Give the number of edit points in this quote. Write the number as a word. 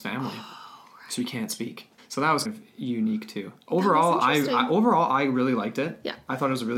two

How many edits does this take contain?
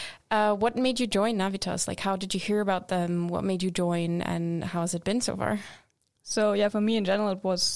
zero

